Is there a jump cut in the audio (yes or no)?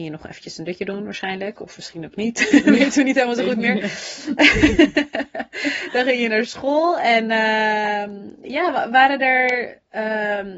no